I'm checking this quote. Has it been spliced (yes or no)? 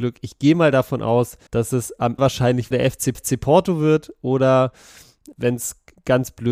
yes